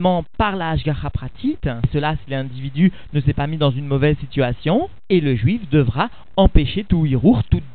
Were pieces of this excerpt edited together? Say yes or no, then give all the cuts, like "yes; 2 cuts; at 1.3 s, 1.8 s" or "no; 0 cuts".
no; 0 cuts